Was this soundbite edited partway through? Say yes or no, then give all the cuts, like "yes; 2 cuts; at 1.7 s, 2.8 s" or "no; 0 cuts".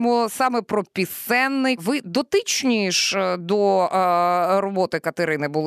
yes; 1 cut; at 1.8 s